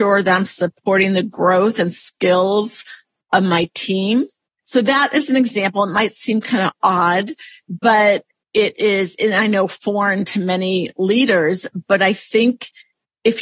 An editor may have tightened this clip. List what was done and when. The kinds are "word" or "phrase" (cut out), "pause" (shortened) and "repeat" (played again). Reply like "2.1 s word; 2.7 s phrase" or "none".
none

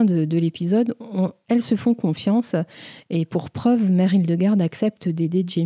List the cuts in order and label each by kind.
none

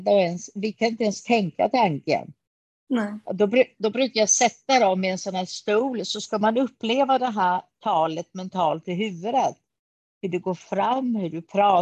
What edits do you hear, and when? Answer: none

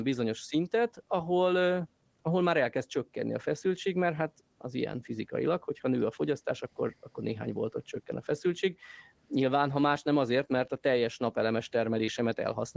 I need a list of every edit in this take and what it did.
none

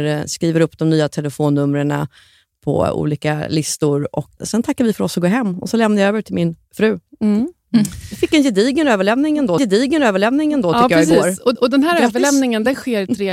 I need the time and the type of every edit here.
4.4 s word; 6.6 s pause; 9.6 s repeat; 11.5 s repeat

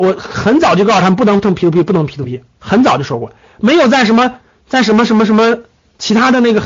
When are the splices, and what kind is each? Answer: 2.5 s pause

